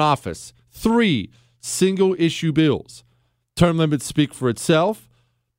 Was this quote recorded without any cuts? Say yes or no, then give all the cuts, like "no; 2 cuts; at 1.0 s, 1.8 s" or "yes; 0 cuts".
yes; 0 cuts